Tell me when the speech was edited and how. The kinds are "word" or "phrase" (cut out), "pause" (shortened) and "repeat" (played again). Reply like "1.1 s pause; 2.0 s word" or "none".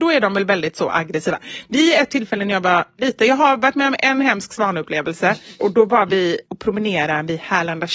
none